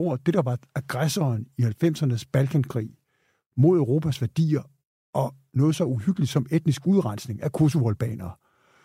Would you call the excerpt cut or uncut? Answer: uncut